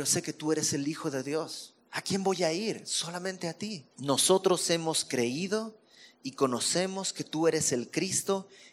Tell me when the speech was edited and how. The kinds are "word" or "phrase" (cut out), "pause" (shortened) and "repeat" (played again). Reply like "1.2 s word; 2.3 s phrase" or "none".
1.8 s pause; 3.9 s pause